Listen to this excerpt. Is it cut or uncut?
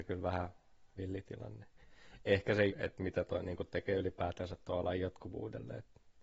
cut